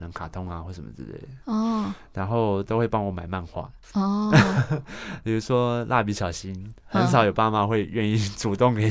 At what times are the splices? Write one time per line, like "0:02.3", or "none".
0:03.8